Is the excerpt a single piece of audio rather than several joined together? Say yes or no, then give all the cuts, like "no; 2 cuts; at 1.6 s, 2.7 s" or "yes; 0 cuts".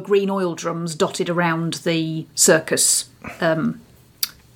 yes; 0 cuts